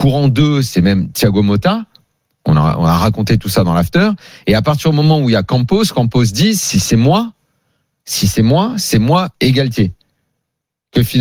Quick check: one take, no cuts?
no; 1 cut; at 9.4 s

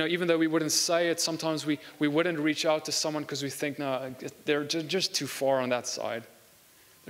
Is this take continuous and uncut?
yes; 0 cuts

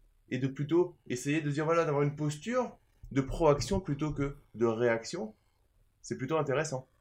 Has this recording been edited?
no; 0 cuts

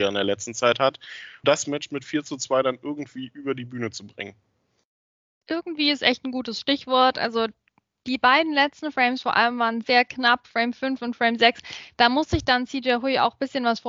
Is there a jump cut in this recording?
yes; 2 cuts; at 1.4 s, 9.8 s

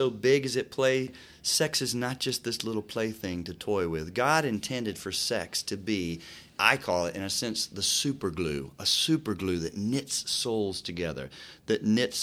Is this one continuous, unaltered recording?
no; 1 cut; at 6.5 s

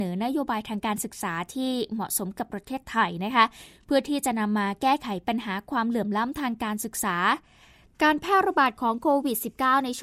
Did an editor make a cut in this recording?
no; 0 cuts

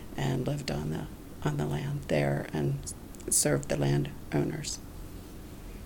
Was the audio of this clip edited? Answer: no; 0 cuts

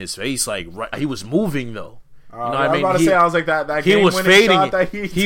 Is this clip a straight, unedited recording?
no; 1 cut; at 0.9 s

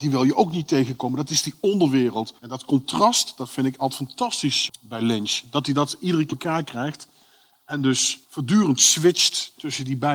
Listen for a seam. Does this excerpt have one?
yes; 4 cuts; at 2.4 s, 4.7 s, 6.3 s, 8.2 s

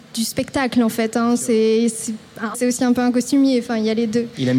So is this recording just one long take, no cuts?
no; 1 cut; at 2.5 s

